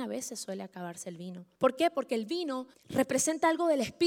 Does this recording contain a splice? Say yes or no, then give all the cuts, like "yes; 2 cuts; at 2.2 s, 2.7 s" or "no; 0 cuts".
yes; 2 cuts; at 1.6 s, 2.7 s